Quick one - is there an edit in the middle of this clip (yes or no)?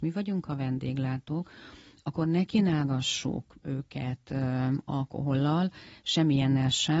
no